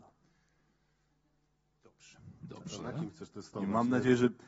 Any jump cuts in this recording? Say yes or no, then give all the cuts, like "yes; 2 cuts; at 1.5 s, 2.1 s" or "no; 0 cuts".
no; 0 cuts